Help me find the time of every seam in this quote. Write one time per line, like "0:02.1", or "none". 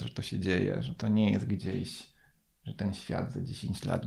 none